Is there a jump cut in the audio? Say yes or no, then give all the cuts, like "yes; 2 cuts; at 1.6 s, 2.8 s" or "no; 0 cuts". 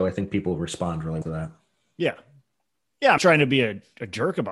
yes; 2 cuts; at 1.2 s, 3.2 s